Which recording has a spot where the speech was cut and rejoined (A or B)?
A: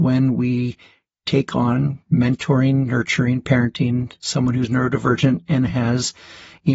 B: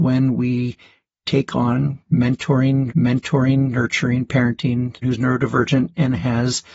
B